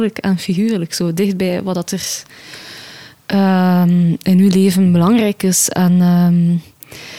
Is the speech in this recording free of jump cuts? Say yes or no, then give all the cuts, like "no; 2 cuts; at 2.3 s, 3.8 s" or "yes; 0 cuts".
yes; 0 cuts